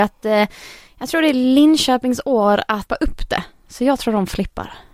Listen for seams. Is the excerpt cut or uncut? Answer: cut